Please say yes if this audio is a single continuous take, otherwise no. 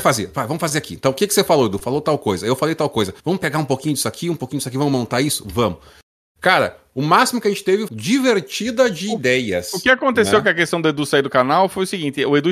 no